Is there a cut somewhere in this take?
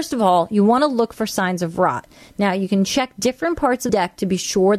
yes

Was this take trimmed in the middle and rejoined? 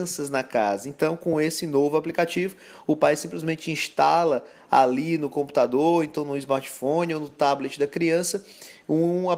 no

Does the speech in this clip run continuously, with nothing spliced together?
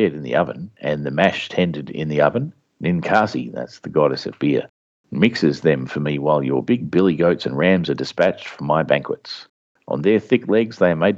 yes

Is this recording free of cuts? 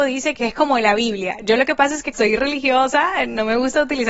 no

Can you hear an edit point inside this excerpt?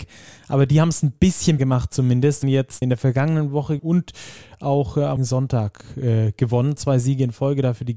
yes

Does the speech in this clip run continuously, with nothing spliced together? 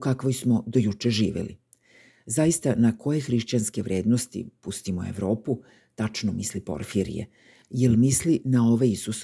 yes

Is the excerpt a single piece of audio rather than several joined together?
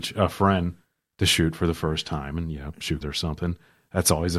no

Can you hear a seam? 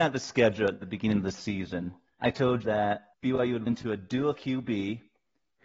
yes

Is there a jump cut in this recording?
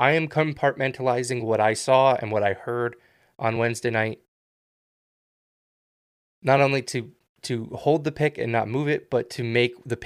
no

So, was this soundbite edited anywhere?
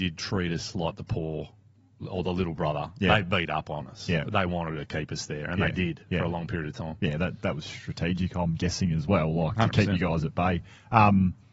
no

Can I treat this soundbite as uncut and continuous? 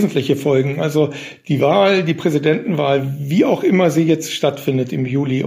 yes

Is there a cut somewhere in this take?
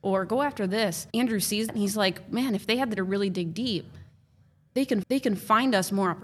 yes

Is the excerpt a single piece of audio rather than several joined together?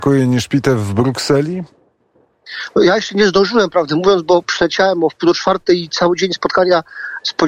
yes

